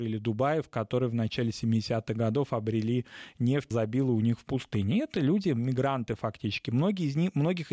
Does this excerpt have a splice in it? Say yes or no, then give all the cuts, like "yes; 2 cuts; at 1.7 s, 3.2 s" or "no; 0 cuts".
yes; 1 cut; at 3.7 s